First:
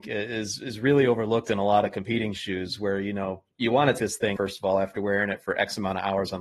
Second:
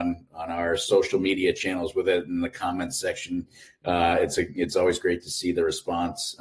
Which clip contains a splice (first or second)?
first